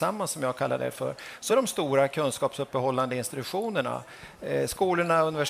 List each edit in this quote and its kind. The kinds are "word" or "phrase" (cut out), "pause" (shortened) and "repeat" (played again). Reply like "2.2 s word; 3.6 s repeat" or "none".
1.5 s word